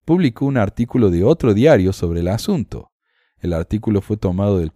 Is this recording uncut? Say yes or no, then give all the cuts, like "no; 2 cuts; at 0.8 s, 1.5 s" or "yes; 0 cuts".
yes; 0 cuts